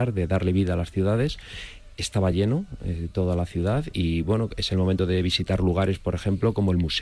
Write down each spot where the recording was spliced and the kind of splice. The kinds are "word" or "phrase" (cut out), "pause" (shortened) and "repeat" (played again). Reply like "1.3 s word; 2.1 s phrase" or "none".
none